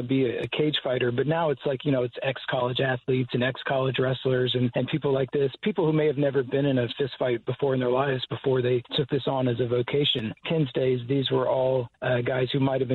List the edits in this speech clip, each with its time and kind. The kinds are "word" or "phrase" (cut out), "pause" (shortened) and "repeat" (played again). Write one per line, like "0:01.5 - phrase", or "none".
none